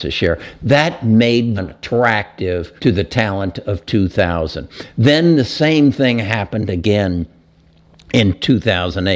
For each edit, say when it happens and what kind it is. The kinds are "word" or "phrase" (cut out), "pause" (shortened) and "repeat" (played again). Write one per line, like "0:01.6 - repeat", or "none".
0:01.6 - word
0:02.8 - pause